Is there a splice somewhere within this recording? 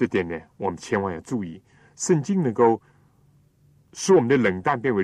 no; 0 cuts

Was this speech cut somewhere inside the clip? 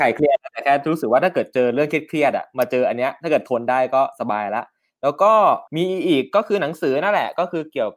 yes; 1 cut; at 5.7 s

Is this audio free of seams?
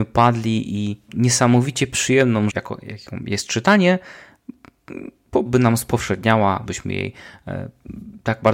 no; 4 cuts; at 1.1 s, 2.5 s, 5.5 s, 6.7 s

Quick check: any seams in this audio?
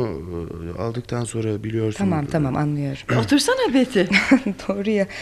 no; 0 cuts

